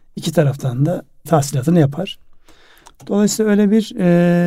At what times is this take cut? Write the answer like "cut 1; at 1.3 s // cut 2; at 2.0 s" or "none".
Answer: cut 1; at 1.3 s